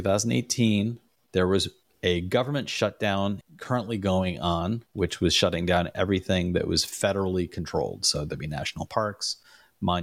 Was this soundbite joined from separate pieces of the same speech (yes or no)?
no